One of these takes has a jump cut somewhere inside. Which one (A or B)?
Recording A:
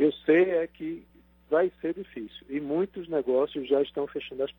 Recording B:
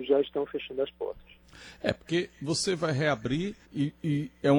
B